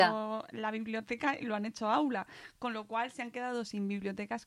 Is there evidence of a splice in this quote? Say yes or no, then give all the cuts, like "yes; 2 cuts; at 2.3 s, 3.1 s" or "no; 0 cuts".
no; 0 cuts